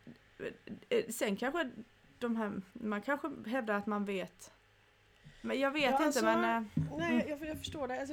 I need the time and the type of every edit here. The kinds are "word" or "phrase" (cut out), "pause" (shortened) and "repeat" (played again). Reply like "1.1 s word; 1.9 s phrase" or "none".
2.7 s pause